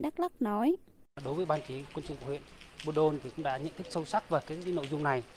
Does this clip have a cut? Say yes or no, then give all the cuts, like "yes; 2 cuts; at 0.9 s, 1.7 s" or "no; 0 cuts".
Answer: no; 0 cuts